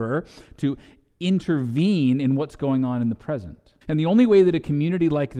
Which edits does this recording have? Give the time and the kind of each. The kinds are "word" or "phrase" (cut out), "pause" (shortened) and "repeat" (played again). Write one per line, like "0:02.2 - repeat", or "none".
0:03.8 - pause